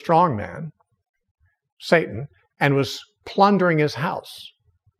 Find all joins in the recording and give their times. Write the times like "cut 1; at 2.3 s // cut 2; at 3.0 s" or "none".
none

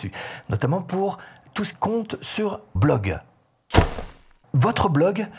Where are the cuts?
cut 1; at 1.7 s // cut 2; at 2.8 s

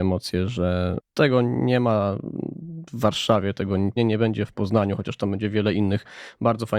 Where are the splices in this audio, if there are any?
cut 1; at 4.0 s

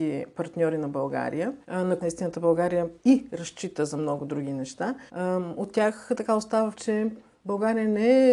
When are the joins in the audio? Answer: cut 1; at 1.6 s // cut 2; at 2.0 s // cut 3; at 3.0 s // cut 4; at 5.1 s // cut 5; at 6.7 s

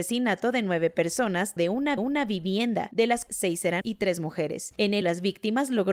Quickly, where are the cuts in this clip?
cut 1; at 1.6 s // cut 2; at 2.0 s // cut 3; at 3.3 s // cut 4; at 3.8 s // cut 5; at 5.0 s

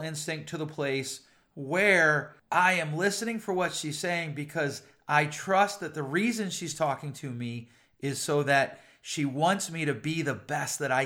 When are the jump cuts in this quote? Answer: none

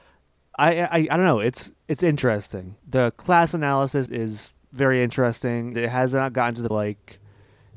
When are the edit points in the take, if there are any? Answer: cut 1; at 2.8 s // cut 2; at 4.1 s // cut 3; at 4.6 s // cut 4; at 5.7 s // cut 5; at 6.7 s

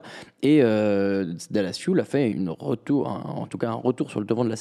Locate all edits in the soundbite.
cut 1; at 2.3 s

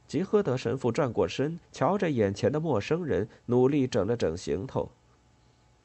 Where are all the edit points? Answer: cut 1; at 1.6 s

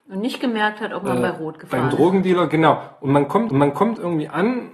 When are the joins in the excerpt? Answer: cut 1; at 3.5 s

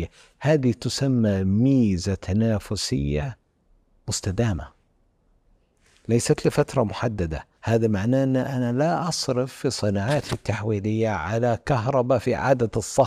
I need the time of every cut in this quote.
cut 1; at 7.6 s

